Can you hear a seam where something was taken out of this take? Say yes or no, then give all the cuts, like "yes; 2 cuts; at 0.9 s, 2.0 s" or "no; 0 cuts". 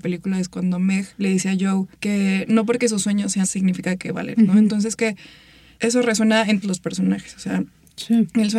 yes; 6 cuts; at 1.1 s, 1.9 s, 3.4 s, 4.3 s, 5.0 s, 6.6 s